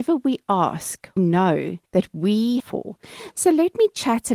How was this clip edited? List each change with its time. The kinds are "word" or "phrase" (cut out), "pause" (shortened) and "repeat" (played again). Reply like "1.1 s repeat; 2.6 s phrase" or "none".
1.2 s word; 1.9 s pause; 2.6 s phrase

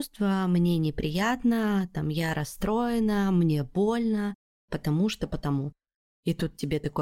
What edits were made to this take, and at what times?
none

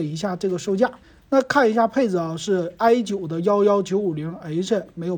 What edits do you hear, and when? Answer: 1.0 s pause

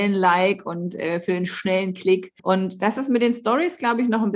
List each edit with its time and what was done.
2.4 s pause

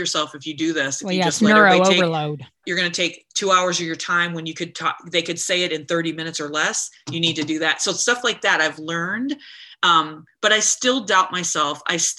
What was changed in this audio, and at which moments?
2.6 s word

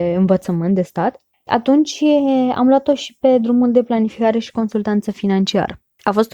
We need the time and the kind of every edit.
1.5 s word

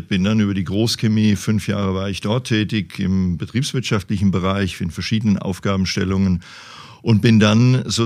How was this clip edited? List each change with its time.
none

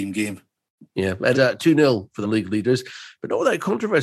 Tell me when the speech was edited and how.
1.3 s word; 2.2 s word

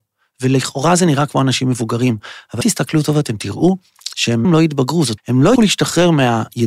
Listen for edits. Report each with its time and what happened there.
2.6 s word; 4.4 s word; 5.2 s word; 5.6 s word

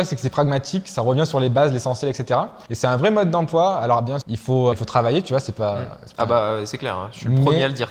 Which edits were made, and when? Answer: 2.7 s pause; 4.2 s word; 4.7 s word

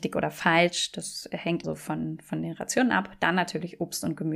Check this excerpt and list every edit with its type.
1.6 s word

